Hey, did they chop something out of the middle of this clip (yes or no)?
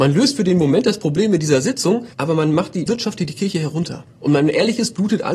yes